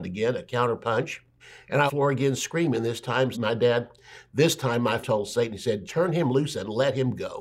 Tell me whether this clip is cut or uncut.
cut